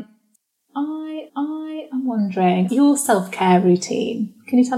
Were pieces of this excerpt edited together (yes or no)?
yes